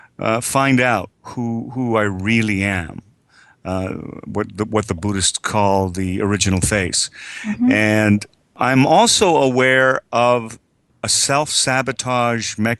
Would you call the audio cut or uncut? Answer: cut